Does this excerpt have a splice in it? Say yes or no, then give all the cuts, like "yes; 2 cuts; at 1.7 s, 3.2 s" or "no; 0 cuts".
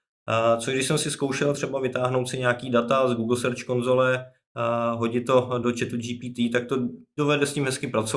no; 0 cuts